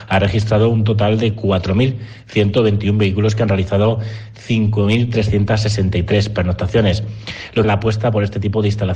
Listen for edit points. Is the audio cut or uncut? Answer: cut